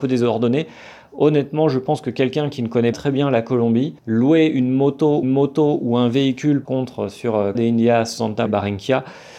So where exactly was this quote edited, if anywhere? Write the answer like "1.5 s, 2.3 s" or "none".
2.9 s, 4.0 s, 5.2 s, 6.6 s, 7.5 s, 8.5 s